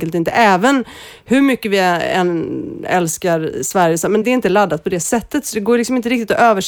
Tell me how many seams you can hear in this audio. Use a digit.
1